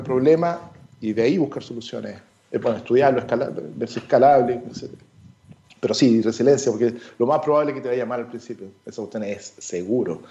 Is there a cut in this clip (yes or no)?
no